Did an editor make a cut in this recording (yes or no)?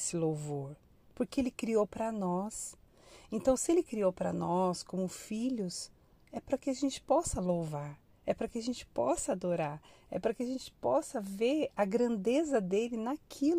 no